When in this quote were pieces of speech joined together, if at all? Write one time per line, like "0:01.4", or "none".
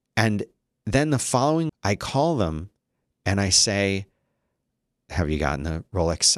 0:01.7